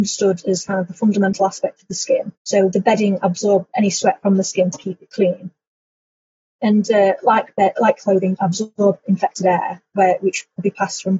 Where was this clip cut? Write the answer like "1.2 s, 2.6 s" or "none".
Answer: 2.4 s, 8.4 s